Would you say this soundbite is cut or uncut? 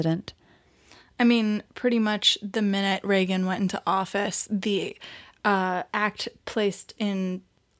cut